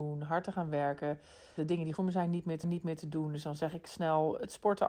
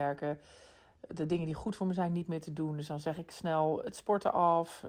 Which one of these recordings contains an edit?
first; 3 cuts; at 1.6 s, 1.9 s, 2.6 s

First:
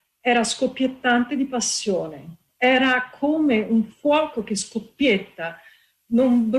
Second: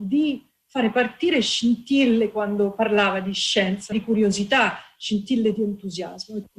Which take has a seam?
second; 1 cut; at 3.9 s

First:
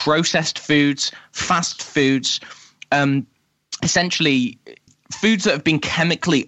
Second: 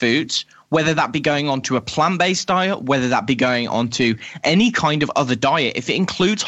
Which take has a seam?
first; 1 cut; at 4.9 s

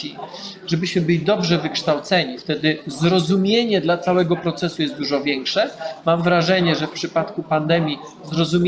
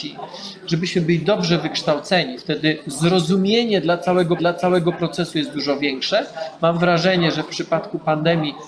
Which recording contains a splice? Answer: second; 1 cut; at 4.4 s

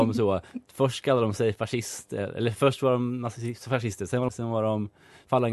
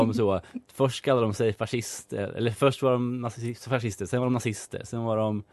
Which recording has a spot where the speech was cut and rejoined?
first; 1 cut; at 4.3 s

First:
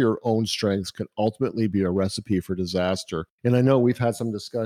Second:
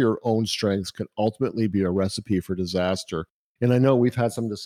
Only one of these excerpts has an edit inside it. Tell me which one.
first; 1 cut; at 3.3 s

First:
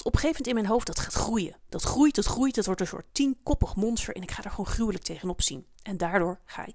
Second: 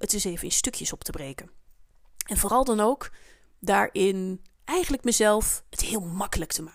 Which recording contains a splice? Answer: second; 1 cut; at 4.5 s

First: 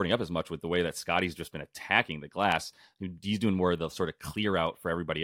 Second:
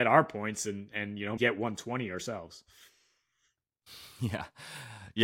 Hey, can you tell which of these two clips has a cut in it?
second; 1 cut; at 1.4 s

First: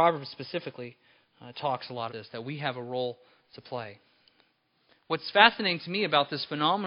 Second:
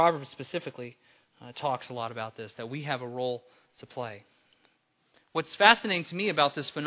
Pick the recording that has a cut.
first; 1 cut; at 2.1 s

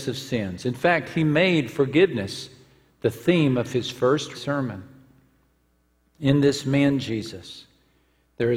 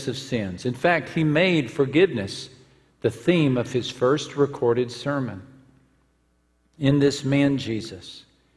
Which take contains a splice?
first; 1 cut; at 4.3 s

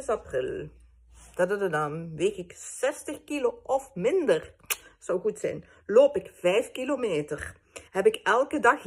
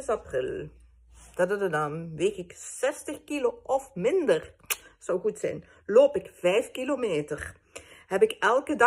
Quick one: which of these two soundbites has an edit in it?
first; 1 cut; at 7.9 s

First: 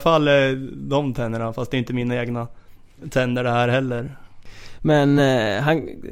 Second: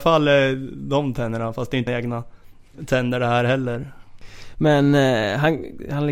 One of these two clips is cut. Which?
second; 1 cut; at 1.9 s

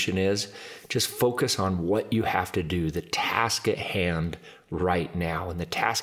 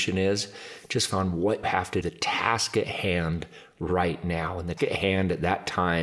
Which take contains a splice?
second; 4 cuts; at 1.1 s, 1.6 s, 2.0 s, 4.8 s

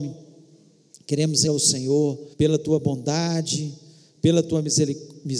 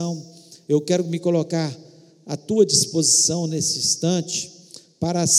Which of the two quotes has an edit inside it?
first; 2 cuts; at 1.5 s, 2.3 s

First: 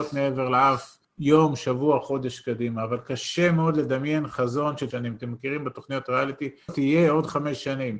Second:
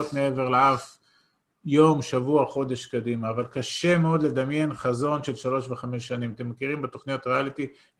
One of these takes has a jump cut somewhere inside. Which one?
first; 3 cuts; at 1.0 s, 4.9 s, 6.7 s

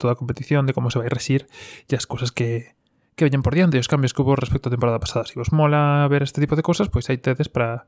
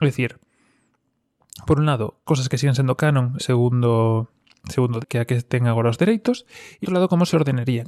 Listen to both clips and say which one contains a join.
second; 4 cuts; at 2.3 s, 3.4 s, 5.0 s, 6.8 s

